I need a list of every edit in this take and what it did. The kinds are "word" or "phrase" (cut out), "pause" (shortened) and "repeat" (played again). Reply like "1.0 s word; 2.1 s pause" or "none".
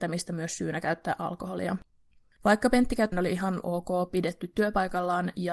3.1 s phrase